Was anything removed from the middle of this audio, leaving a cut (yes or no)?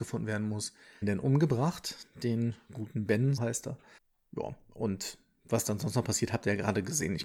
yes